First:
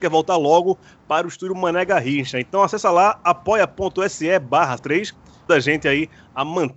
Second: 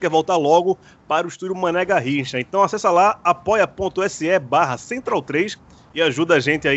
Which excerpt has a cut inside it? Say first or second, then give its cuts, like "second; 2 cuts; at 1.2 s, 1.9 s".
first; 2 cuts; at 4.8 s, 5.5 s